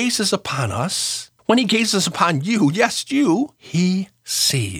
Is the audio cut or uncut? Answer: cut